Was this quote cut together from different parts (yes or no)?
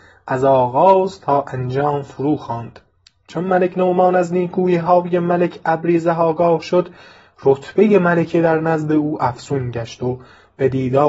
no